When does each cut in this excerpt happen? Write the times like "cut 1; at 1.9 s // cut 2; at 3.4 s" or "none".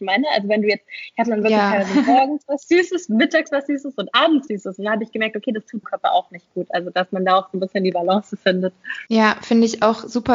cut 1; at 4.5 s // cut 2; at 5.8 s // cut 3; at 9.1 s